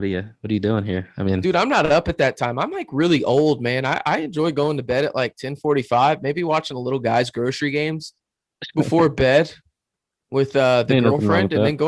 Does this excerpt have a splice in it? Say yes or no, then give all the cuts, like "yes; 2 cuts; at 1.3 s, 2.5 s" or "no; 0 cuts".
no; 0 cuts